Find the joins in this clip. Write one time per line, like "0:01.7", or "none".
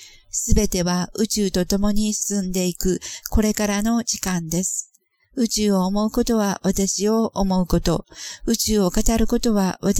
none